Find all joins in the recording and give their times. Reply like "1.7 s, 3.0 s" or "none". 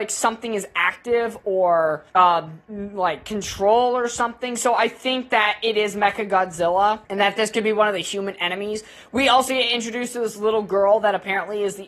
2.1 s, 7.0 s